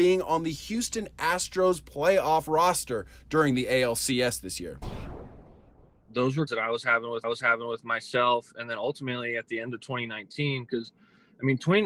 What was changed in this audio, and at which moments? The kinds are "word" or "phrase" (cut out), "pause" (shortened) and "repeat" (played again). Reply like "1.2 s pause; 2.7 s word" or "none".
6.5 s word; 7.2 s repeat